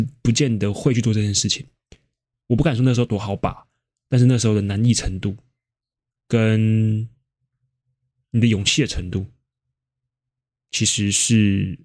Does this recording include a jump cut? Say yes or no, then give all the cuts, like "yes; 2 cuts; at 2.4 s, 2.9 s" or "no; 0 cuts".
no; 0 cuts